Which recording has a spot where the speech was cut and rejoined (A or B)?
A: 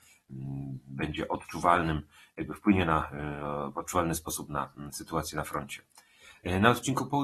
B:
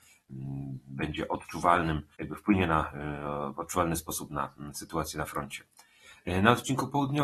B